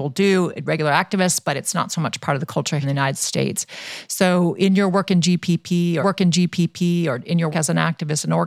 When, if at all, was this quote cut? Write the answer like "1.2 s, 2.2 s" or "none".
2.8 s, 6.0 s, 7.5 s